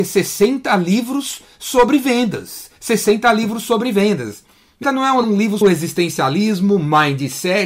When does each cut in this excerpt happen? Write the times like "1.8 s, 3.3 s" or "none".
2.8 s, 4.8 s, 5.2 s, 5.6 s

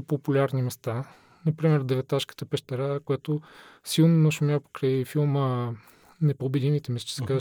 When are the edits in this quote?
none

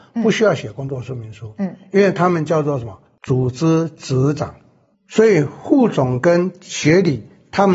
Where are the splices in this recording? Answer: none

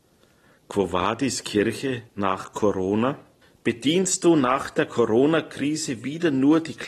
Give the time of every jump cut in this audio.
2.1 s, 3.4 s

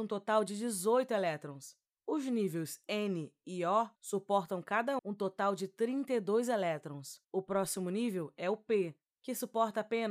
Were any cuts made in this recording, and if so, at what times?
4.0 s, 5.0 s, 7.2 s

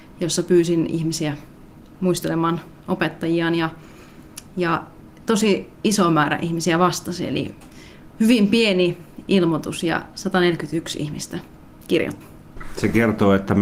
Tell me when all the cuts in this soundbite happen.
none

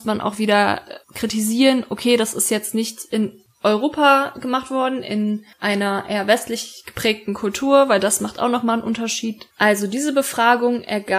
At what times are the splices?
1.0 s, 5.5 s

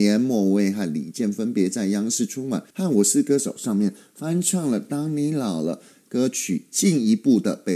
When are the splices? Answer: 2.7 s

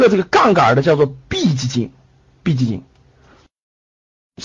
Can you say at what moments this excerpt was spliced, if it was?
none

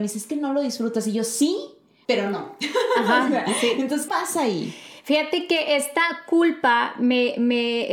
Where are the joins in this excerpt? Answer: 2.0 s, 4.1 s

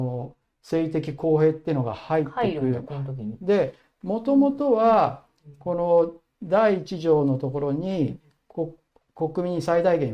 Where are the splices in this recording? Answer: none

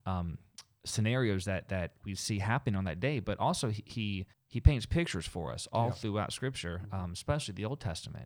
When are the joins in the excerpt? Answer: 4.3 s

